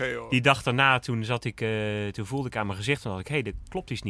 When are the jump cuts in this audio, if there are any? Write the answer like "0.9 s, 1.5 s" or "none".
none